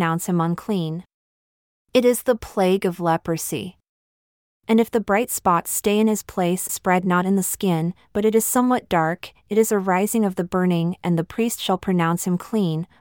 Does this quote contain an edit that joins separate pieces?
yes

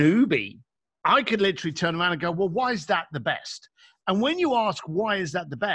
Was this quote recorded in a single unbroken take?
yes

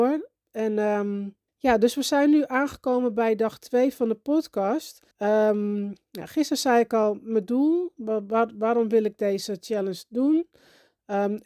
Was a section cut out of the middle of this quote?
yes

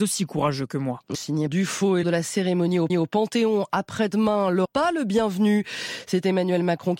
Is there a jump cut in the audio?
yes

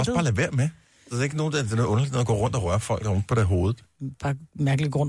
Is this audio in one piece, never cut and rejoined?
yes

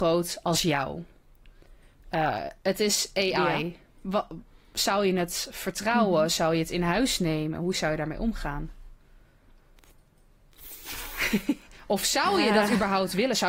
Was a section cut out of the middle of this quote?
no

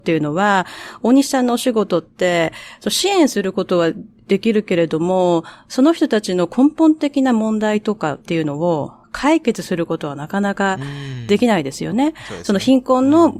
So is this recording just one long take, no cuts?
no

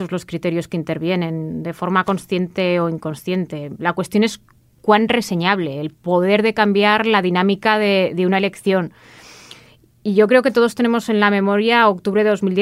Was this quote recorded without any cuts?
yes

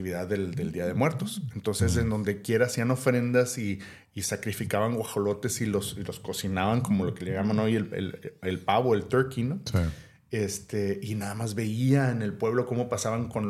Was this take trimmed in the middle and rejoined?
no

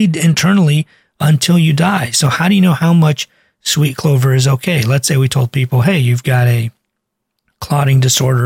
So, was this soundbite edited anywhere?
no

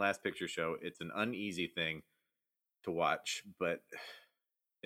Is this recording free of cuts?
yes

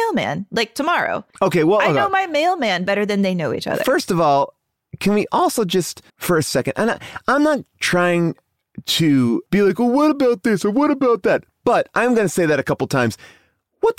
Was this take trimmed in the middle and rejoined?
yes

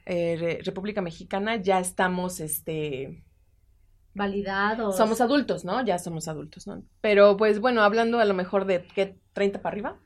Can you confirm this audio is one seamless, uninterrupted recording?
yes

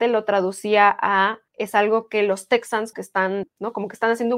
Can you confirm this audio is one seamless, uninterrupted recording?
no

